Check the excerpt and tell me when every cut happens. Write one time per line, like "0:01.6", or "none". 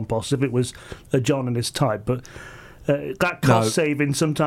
none